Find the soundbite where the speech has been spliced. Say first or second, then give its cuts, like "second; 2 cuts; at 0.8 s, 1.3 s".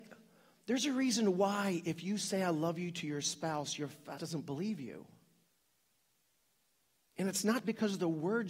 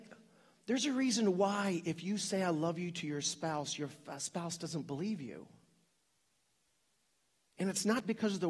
first; 1 cut; at 4.2 s